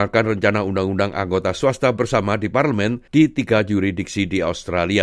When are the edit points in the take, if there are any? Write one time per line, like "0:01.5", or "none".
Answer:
0:03.1